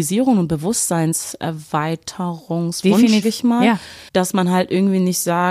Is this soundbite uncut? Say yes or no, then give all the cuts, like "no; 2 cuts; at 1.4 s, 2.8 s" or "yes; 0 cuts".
no; 2 cuts; at 3.2 s, 4.1 s